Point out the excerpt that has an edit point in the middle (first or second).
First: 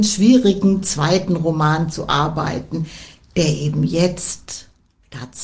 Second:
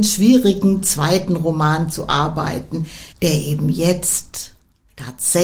second